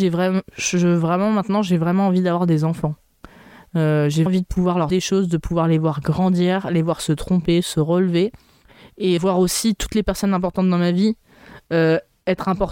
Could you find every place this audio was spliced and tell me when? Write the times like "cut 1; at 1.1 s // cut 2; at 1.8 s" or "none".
cut 1; at 4.3 s // cut 2; at 4.9 s // cut 3; at 9.2 s